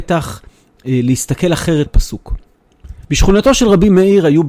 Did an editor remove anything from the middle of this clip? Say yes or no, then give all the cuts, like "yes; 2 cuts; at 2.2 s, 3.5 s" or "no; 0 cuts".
yes; 2 cuts; at 1.9 s, 3.0 s